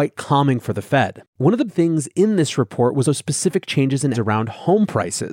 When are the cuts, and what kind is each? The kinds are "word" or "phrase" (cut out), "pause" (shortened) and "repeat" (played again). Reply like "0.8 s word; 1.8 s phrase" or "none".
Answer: 1.3 s pause; 1.7 s word; 3.0 s word; 4.1 s word